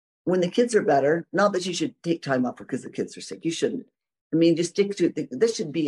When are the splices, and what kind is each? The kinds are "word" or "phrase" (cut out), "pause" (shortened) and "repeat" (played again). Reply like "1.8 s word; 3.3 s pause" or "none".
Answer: none

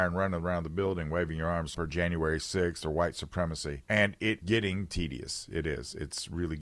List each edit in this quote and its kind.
1.7 s phrase; 3.8 s pause; 4.4 s word

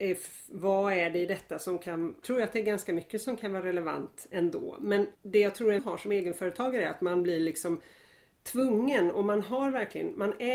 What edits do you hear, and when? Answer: 2.2 s word; 5.1 s pause; 5.8 s phrase

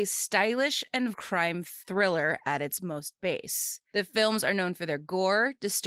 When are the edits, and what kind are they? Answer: 1.1 s word

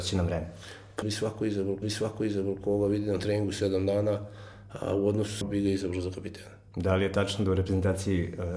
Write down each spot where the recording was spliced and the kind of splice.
1.0 s phrase; 1.8 s repeat; 5.4 s phrase; 6.7 s pause

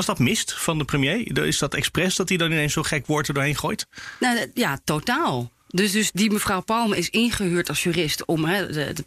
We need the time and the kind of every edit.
6.1 s word

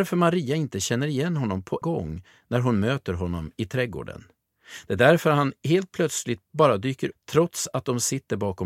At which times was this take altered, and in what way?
1.8 s word; 7.1 s phrase

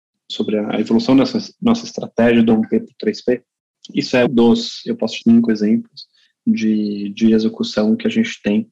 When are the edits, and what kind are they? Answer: 4.3 s word; 5.2 s phrase

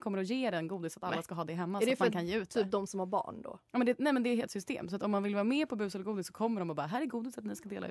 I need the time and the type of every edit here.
4.5 s word

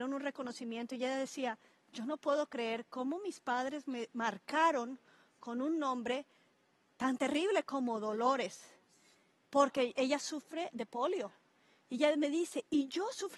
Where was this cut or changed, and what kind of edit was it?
none

